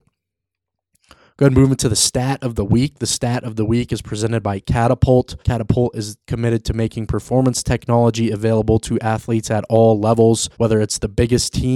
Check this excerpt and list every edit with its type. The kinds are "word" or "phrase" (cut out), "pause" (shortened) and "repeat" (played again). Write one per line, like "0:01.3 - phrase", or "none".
0:05.4 - pause
0:10.5 - pause